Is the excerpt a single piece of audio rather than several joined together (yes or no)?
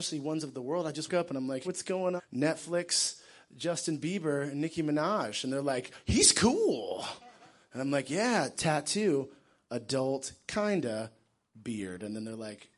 no